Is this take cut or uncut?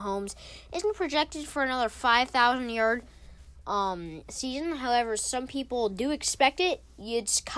uncut